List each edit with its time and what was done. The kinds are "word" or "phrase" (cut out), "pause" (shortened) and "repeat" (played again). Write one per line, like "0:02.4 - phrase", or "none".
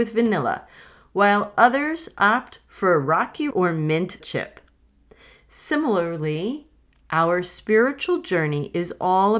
0:03.5 - word
0:04.2 - word